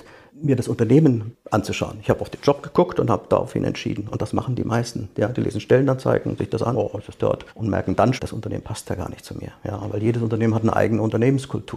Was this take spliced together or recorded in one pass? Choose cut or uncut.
cut